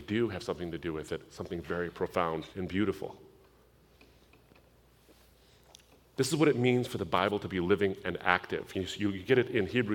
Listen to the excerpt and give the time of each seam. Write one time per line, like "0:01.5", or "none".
0:02.5